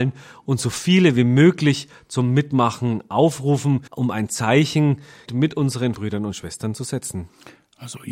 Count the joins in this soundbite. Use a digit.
3